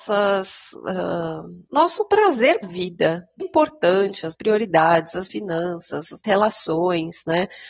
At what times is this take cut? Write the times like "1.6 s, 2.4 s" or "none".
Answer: 1.7 s, 2.6 s, 3.4 s, 4.3 s, 5.3 s, 6.2 s